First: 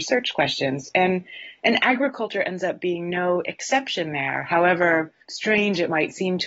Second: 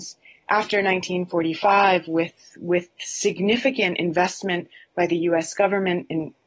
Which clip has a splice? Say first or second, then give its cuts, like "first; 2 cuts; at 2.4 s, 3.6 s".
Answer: first; 1 cut; at 5.2 s